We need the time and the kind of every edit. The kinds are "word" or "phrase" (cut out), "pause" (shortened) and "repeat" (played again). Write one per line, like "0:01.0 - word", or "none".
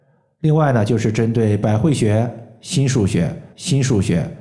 0:03.5 - repeat

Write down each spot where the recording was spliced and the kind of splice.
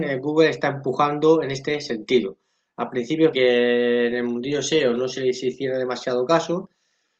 0:03.3 - word

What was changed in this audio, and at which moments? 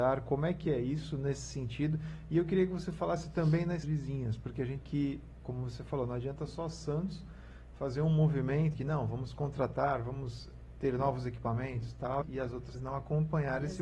0:03.8 - word
0:04.8 - word
0:05.4 - word
0:08.7 - word
0:12.2 - word
0:12.7 - word

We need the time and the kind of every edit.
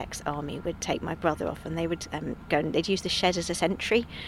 none

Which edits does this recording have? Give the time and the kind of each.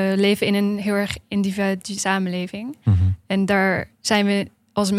0:02.0 - word
0:03.2 - pause

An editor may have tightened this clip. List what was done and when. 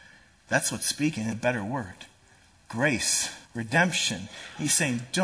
0:01.3 - word
0:03.5 - word

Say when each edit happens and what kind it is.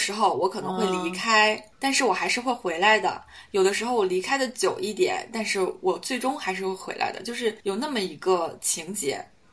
0:01.7 - pause
0:07.6 - pause

